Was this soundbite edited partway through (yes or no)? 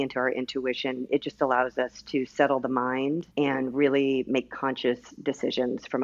yes